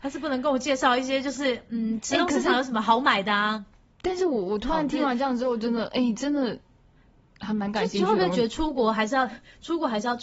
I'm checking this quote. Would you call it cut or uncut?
uncut